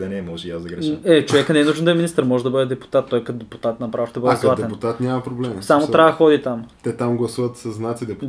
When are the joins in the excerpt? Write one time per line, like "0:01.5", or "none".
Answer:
0:06.7